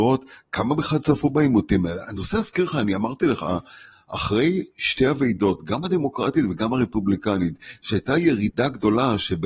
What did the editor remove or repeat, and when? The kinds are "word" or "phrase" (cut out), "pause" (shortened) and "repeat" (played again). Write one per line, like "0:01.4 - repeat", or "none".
none